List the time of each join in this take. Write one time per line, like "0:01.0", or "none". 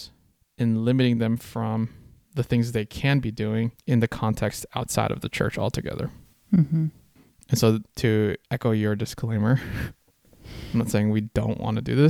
none